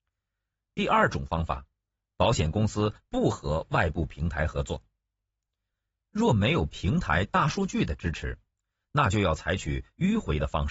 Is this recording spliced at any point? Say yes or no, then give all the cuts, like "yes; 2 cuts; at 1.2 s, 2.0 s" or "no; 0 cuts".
no; 0 cuts